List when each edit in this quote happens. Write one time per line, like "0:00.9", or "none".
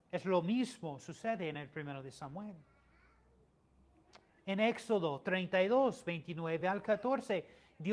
none